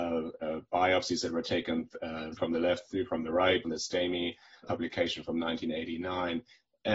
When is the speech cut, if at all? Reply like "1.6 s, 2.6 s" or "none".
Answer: 2.4 s, 3.6 s, 4.6 s